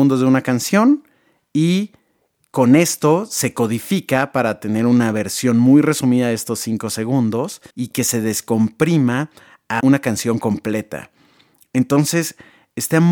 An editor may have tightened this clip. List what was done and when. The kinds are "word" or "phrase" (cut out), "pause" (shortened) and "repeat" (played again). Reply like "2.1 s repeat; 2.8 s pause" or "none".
7.7 s pause; 9.8 s word